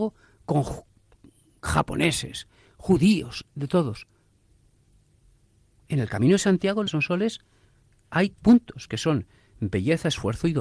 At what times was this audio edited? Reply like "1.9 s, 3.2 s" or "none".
6.9 s, 8.3 s